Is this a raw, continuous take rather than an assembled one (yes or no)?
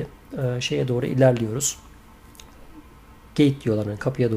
yes